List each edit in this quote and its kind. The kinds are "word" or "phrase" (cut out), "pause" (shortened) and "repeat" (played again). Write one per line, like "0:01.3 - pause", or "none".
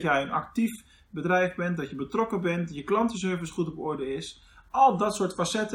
none